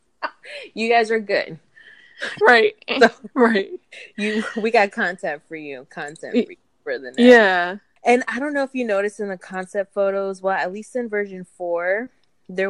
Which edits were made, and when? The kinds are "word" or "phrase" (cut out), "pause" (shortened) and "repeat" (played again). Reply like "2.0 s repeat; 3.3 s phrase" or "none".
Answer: none